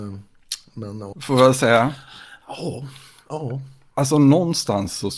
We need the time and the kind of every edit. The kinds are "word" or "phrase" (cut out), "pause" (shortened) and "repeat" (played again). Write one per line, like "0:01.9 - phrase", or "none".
0:01.1 - word